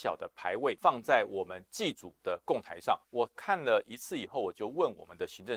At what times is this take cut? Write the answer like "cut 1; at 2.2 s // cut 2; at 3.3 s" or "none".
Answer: cut 1; at 2.2 s